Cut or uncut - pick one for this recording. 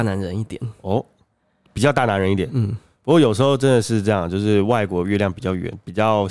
uncut